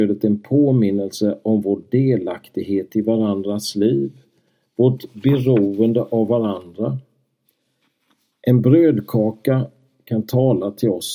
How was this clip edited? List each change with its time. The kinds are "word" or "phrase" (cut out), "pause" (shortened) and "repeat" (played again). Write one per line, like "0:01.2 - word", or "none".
none